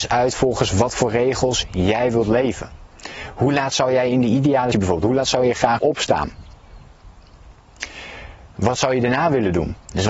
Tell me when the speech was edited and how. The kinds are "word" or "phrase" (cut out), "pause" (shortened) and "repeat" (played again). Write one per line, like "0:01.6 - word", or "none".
0:04.7 - word
0:05.8 - word